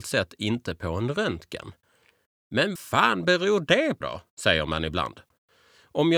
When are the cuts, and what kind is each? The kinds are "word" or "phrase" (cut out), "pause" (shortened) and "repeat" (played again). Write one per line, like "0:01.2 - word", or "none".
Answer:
0:02.8 - word
0:04.0 - word